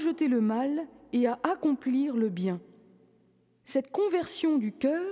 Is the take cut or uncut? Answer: uncut